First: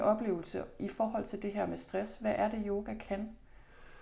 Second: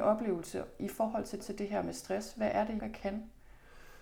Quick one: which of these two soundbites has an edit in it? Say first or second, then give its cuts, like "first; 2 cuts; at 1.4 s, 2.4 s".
second; 2 cuts; at 1.4 s, 2.8 s